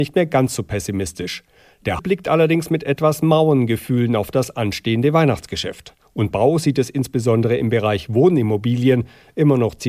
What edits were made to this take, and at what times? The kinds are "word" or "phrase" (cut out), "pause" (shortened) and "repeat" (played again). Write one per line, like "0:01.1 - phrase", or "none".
0:02.0 - word
0:06.3 - word